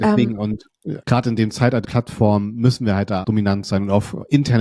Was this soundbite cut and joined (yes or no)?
yes